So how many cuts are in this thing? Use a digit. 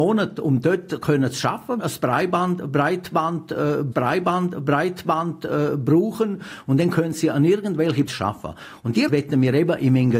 4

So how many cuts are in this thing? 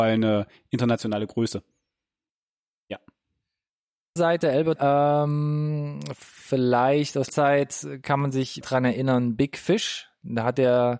4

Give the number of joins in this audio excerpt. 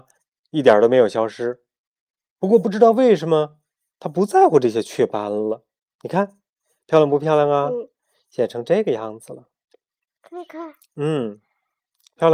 0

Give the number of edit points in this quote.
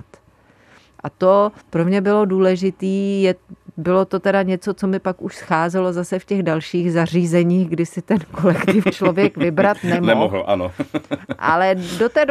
1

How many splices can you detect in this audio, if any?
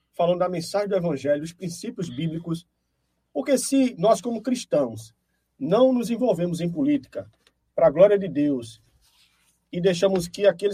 0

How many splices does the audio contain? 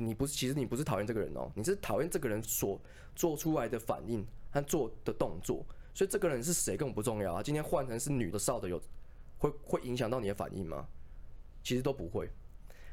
1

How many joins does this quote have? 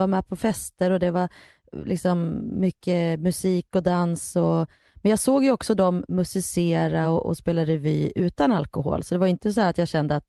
0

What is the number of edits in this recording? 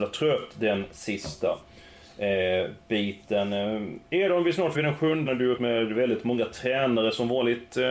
3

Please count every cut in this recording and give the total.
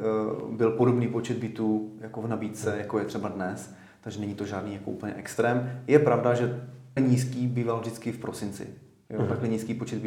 1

